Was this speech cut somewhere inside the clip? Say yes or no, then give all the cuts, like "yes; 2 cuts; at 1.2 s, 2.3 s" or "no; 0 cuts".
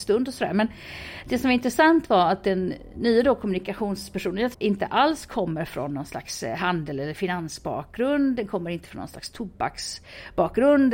yes; 1 cut; at 4.5 s